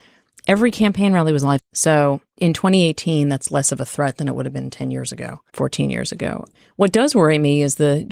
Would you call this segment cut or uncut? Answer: cut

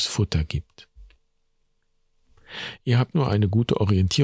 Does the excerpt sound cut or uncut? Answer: cut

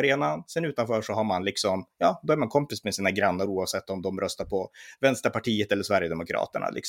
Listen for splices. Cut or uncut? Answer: uncut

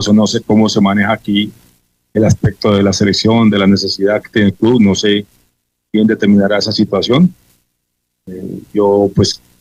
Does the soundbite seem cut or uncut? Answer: uncut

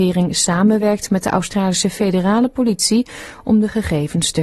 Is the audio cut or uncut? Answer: uncut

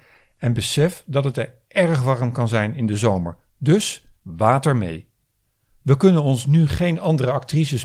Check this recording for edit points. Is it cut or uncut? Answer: cut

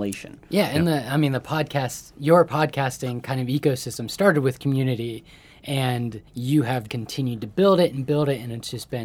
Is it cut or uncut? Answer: cut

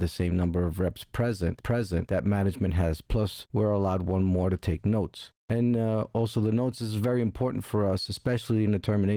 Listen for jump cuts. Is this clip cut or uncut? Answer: cut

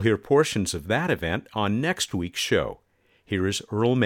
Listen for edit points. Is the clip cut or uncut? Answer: uncut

